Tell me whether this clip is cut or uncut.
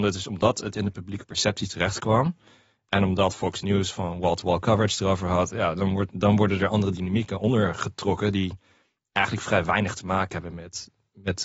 uncut